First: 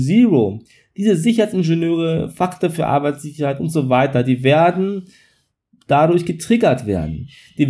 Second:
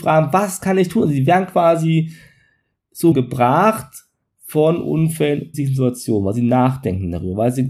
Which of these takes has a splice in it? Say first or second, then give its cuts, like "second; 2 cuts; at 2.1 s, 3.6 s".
second; 2 cuts; at 3.1 s, 5.5 s